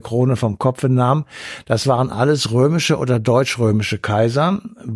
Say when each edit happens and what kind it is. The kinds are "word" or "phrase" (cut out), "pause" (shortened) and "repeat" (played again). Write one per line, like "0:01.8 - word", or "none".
none